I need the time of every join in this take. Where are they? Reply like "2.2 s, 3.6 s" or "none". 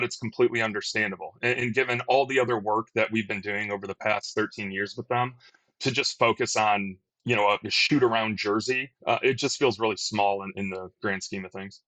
7.6 s, 9.0 s